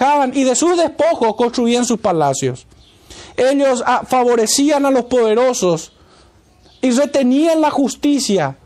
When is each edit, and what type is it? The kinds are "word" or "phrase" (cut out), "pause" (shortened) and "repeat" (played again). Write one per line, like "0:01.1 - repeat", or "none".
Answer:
none